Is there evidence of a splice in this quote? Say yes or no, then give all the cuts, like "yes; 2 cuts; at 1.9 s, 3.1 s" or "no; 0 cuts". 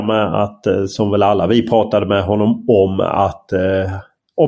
no; 0 cuts